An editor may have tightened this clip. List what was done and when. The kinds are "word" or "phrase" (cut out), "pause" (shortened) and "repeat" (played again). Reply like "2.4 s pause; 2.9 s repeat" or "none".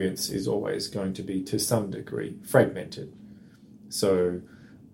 none

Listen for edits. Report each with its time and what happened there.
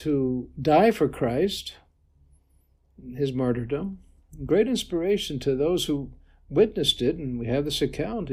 none

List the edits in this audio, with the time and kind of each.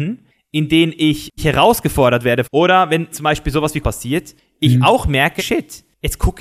1.4 s phrase; 2.4 s phrase; 3.1 s word; 3.8 s word; 5.4 s word

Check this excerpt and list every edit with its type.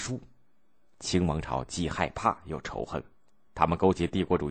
none

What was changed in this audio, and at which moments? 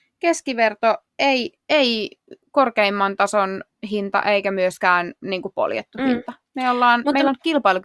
1.1 s pause; 5.2 s pause

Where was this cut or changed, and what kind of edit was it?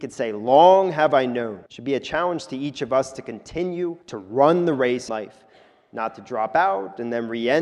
1.7 s pause; 4.0 s pause; 5.1 s phrase

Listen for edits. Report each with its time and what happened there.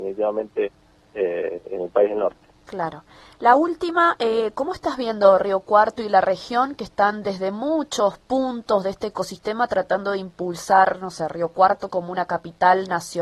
none

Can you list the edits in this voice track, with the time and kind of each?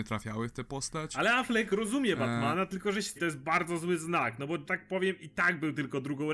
3.2 s phrase; 4.7 s phrase

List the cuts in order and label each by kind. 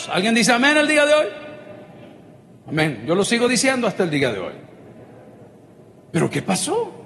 none

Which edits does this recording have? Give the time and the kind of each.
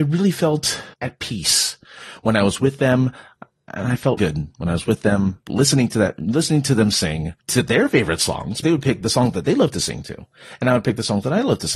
0.9 s pause; 4.2 s word; 7.4 s pause; 8.6 s word

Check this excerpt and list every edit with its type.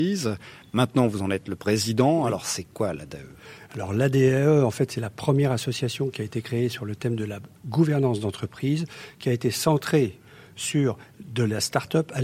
none

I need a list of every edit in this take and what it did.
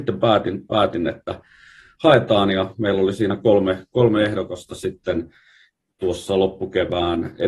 none

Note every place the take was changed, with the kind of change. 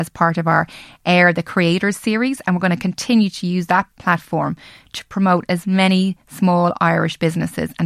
none

